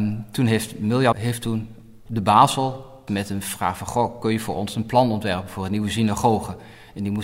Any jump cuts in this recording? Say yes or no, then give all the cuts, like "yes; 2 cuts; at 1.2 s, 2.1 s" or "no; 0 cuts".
yes; 2 cuts; at 1.1 s, 3.1 s